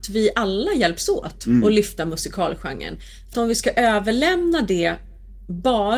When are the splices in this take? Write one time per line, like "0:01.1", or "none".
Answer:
0:03.3